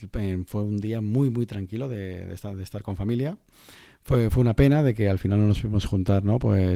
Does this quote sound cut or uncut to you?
uncut